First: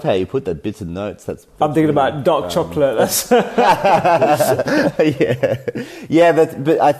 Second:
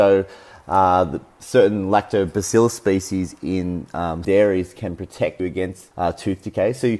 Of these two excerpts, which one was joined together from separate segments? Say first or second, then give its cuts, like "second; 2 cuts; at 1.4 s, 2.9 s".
second; 3 cuts; at 4.2 s, 5.4 s, 5.9 s